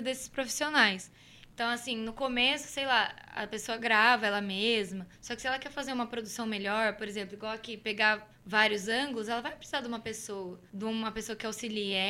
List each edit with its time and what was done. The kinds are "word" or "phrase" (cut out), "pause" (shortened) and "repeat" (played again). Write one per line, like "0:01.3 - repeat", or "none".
0:05.1 - pause
0:08.3 - pause
0:10.7 - pause

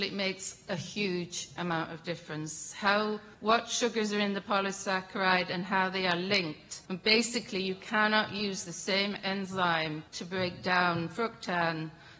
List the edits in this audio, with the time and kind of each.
0:03.3 - pause
0:06.9 - pause
0:10.1 - pause

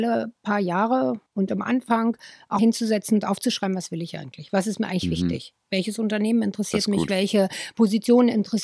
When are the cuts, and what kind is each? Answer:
0:01.3 - pause
0:02.6 - word

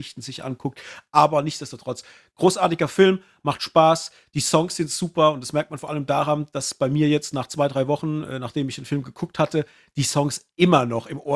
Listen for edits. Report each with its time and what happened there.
none

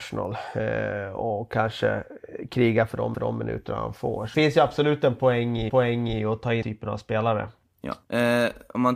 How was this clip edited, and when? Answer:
0:03.1 - repeat
0:04.3 - phrase
0:05.7 - repeat
0:06.6 - word
0:08.0 - pause

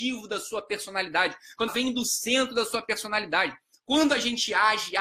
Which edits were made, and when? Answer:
0:01.7 - word

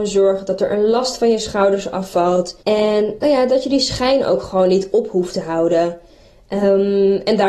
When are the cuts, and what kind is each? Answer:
0:02.6 - pause

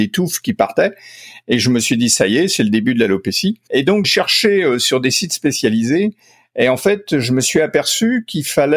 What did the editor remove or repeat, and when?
0:04.0 - word

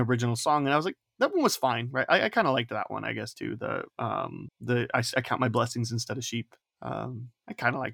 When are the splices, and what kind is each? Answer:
none

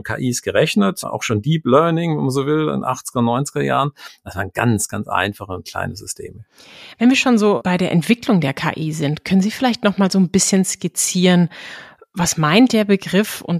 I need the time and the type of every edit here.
none

